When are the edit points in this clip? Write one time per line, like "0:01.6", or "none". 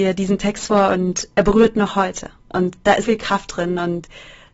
0:03.0

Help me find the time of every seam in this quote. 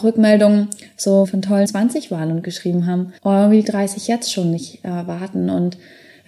0:01.2
0:01.6
0:03.2
0:03.6

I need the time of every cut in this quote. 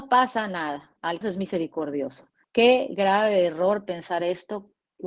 0:01.2
0:02.4

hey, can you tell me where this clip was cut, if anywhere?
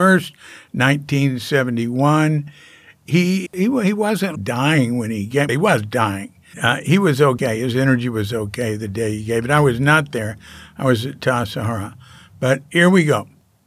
0:03.5
0:04.3
0:05.5
0:06.5

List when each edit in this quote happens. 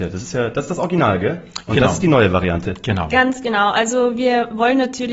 none

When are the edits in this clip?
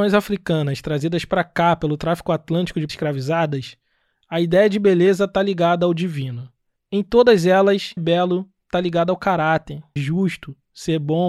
0:02.9
0:08.0
0:10.0

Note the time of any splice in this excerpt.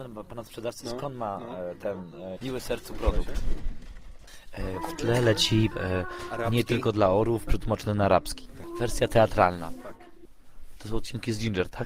0:02.4
0:05.7

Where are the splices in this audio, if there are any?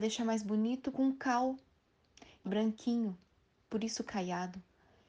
0:00.9
0:02.4

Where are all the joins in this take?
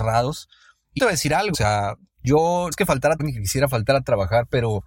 0:01.0
0:01.5
0:02.7
0:03.2

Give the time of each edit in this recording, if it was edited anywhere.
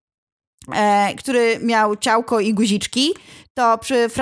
none

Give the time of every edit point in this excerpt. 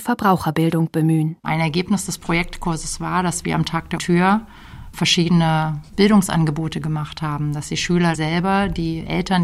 0:01.4
0:04.0
0:05.9
0:08.1

